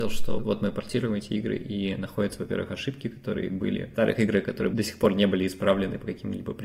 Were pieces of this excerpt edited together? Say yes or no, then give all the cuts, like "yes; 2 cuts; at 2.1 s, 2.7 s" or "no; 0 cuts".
no; 0 cuts